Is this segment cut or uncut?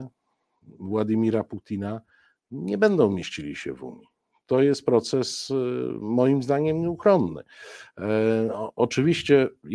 uncut